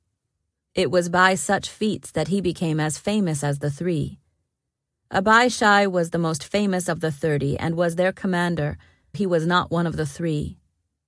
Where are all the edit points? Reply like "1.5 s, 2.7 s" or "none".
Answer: 9.1 s